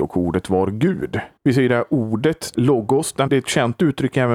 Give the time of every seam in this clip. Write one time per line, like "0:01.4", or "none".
0:01.4
0:02.5
0:03.3